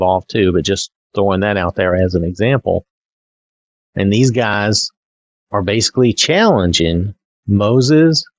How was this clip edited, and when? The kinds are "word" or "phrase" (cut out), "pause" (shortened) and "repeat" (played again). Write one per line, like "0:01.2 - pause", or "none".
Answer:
none